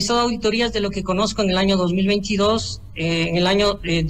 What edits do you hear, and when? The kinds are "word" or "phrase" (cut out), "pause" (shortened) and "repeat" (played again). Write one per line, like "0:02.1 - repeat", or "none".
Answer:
none